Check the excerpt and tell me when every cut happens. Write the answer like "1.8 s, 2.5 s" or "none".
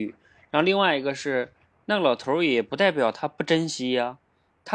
none